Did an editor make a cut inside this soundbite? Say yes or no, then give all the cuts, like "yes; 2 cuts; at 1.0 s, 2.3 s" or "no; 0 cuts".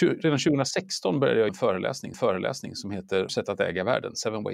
yes; 3 cuts; at 1.5 s, 2.1 s, 3.3 s